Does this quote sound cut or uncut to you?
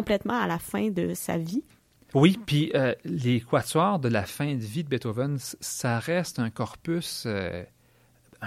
uncut